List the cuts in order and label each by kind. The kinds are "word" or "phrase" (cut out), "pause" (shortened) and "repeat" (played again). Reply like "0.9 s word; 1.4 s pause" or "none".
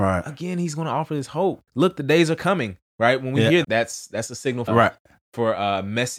1.7 s pause; 2.9 s pause; 3.6 s word; 4.7 s phrase